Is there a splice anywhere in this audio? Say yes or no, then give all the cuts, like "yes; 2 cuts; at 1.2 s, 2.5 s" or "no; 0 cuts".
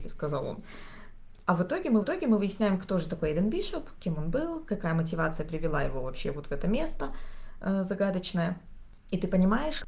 yes; 1 cut; at 2.0 s